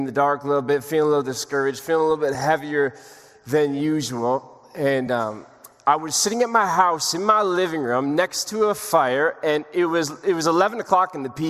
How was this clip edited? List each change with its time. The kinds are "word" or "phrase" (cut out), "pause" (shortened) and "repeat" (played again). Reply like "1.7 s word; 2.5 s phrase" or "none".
none

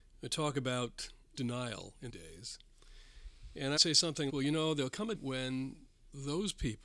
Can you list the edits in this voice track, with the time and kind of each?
1.3 s word; 2.1 s word; 3.8 s word; 4.3 s word; 5.1 s word

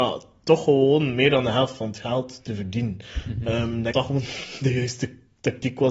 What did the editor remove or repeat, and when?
3.9 s word

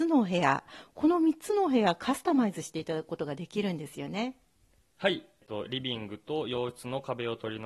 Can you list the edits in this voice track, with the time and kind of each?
none

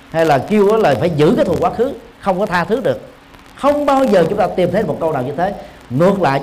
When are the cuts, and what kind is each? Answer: none

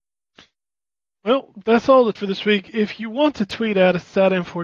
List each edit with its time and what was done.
2.2 s word

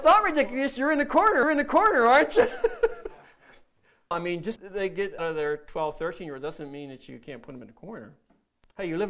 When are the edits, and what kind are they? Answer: 1.4 s repeat; 4.1 s word; 4.6 s word; 5.2 s word

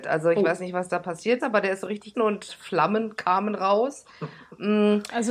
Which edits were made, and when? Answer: 1.4 s word; 2.1 s word; 2.5 s word

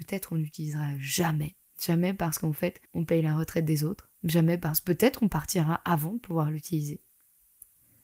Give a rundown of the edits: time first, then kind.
1.6 s pause; 2.9 s pause; 4.1 s pause

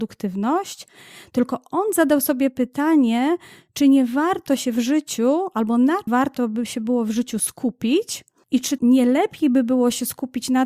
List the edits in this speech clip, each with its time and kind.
6.1 s word; 8.8 s word

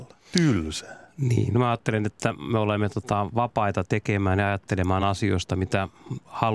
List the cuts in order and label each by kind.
none

